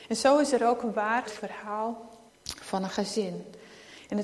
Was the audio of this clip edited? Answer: yes; 2 cuts; at 1.2 s, 2.3 s

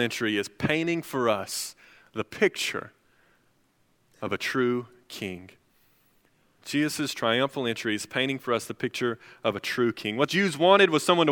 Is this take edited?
yes; 1 cut; at 10.3 s

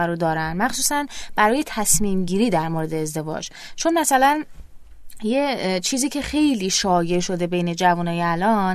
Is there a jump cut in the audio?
no; 0 cuts

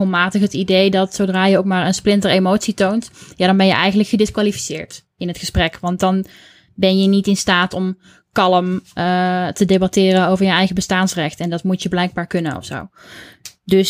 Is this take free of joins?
yes; 0 cuts

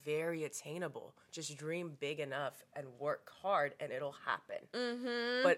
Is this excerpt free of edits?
yes; 0 cuts

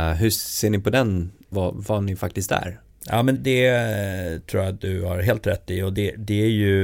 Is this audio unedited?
no; 2 cuts; at 1.5 s, 3.3 s

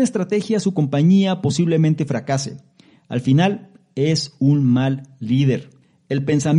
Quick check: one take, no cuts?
yes; 0 cuts

